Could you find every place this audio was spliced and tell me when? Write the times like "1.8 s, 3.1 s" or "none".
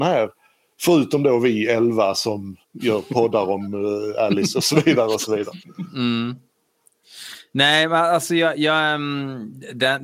2.6 s